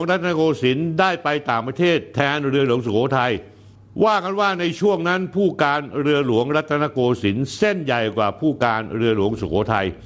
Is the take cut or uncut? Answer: uncut